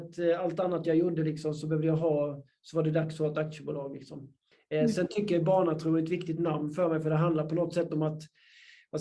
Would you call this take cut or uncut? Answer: uncut